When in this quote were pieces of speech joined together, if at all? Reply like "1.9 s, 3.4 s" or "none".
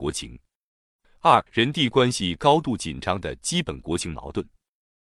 1.5 s